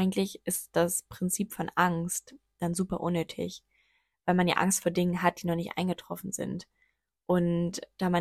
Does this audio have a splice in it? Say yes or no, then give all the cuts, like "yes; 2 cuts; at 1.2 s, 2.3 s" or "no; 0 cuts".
no; 0 cuts